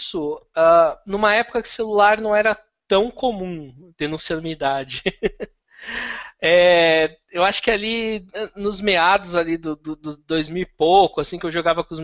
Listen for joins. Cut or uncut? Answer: uncut